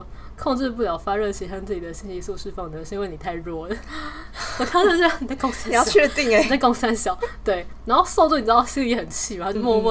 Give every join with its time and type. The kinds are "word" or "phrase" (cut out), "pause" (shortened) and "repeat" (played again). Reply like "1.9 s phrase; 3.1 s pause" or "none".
none